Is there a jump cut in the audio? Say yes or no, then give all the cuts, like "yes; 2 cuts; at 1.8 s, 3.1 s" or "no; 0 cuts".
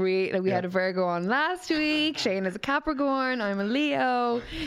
no; 0 cuts